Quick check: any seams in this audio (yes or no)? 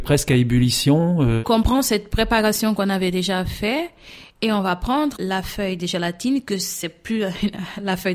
yes